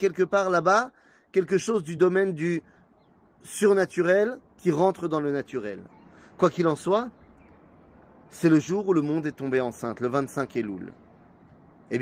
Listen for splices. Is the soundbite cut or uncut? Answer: uncut